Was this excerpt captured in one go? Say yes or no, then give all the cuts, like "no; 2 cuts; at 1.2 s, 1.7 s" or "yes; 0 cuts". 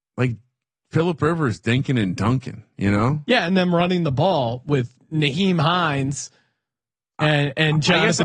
yes; 0 cuts